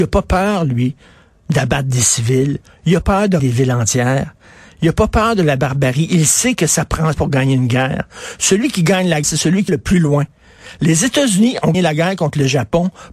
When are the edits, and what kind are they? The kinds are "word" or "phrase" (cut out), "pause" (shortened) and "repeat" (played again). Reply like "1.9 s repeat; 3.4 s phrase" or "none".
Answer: 3.0 s word; 3.4 s word; 7.1 s word; 9.2 s word; 9.7 s word; 11.7 s word